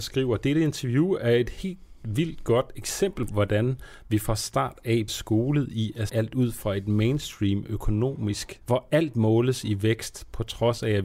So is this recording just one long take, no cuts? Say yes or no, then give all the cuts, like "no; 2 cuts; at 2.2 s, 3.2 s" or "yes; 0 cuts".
no; 4 cuts; at 3.3 s, 5.1 s, 6.1 s, 8.6 s